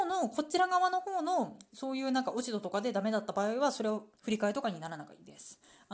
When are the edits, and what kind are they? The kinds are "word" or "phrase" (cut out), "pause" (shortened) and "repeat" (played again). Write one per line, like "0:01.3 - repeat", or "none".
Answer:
0:01.7 - pause
0:04.1 - pause